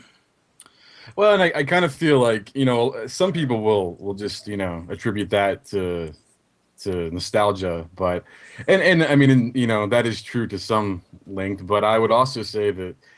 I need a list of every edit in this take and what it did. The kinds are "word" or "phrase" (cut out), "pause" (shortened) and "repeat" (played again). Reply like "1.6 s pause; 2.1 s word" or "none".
none